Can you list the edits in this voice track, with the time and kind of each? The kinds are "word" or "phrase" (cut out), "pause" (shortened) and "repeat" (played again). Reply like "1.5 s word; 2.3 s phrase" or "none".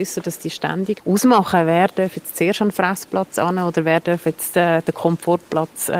1.0 s word